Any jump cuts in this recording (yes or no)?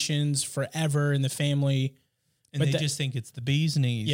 no